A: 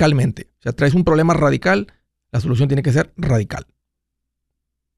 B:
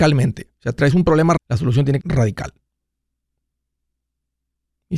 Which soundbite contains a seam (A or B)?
B